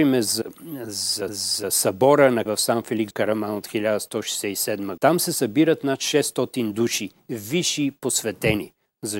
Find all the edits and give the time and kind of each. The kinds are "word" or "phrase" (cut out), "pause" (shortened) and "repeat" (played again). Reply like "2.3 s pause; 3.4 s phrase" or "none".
1.3 s repeat; 2.5 s word; 3.1 s word; 5.0 s word